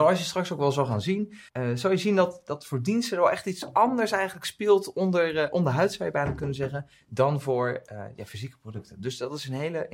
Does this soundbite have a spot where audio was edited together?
yes; 1 cut; at 1.5 s

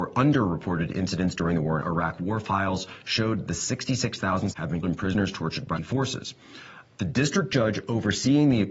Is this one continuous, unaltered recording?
no; 4 cuts; at 1.8 s, 4.5 s, 4.8 s, 5.8 s

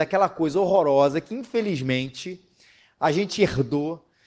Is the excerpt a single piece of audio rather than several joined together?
yes; 0 cuts

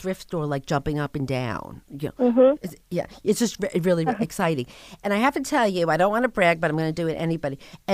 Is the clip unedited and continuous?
no; 1 cut; at 4.1 s

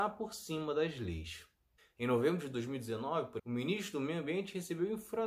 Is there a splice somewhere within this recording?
yes; 1 cut; at 3.4 s

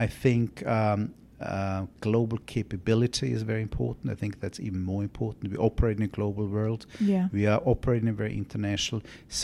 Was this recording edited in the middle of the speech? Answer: no; 0 cuts

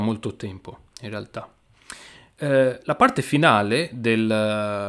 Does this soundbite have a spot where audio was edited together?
no; 0 cuts

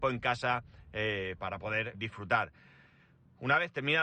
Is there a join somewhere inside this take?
yes; 2 cuts; at 1.4 s, 1.9 s

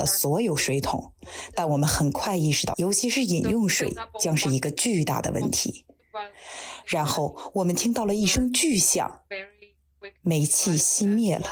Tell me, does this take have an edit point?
yes; 1 cut; at 2.7 s

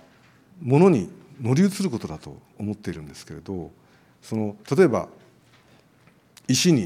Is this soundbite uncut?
no; 1 cut; at 4.6 s

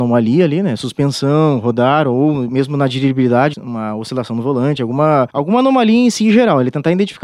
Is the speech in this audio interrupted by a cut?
yes; 2 cuts; at 3.5 s, 5.3 s

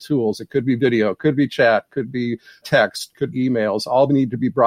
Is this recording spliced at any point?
yes; 2 cuts; at 2.6 s, 3.3 s

